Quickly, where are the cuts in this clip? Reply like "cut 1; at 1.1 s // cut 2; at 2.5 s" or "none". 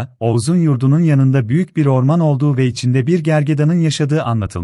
none